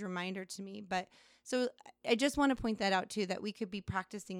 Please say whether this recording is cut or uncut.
uncut